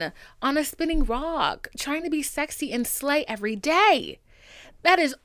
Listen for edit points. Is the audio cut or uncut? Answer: uncut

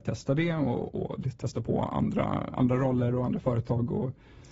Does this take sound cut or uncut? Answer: uncut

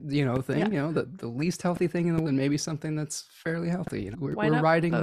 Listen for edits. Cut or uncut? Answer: cut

